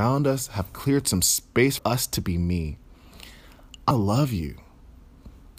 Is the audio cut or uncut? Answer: cut